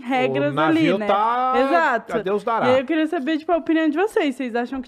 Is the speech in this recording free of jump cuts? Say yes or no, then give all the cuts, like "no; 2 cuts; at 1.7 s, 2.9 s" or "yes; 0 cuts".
yes; 0 cuts